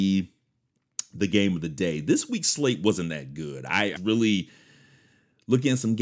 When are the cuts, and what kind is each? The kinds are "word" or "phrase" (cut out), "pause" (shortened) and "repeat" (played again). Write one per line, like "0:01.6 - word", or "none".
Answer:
0:04.0 - word